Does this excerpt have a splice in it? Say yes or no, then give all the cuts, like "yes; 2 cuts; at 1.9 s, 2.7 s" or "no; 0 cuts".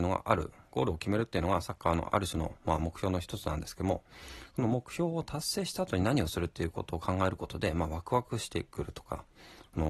no; 0 cuts